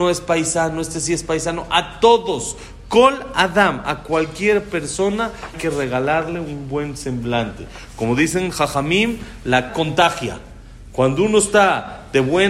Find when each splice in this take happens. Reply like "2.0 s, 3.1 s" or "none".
5.5 s, 9.7 s